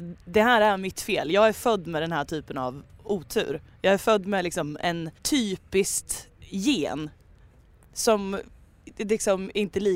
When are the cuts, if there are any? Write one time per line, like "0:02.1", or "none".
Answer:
0:05.2